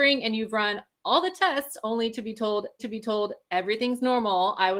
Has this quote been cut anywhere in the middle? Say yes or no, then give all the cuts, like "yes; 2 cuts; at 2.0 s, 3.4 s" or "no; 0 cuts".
yes; 1 cut; at 2.8 s